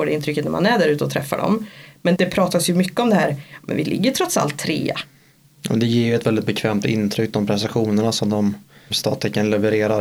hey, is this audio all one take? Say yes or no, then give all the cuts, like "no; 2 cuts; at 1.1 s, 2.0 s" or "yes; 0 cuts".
no; 2 cuts; at 2.2 s, 8.9 s